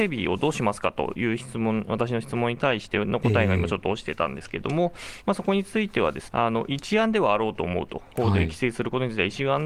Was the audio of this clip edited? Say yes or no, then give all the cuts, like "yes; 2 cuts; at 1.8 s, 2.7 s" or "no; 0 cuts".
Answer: yes; 1 cut; at 6.3 s